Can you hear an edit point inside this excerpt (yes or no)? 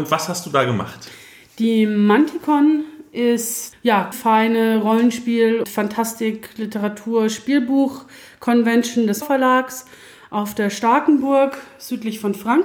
yes